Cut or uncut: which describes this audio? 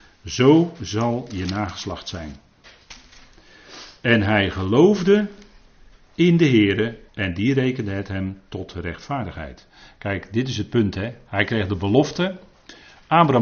cut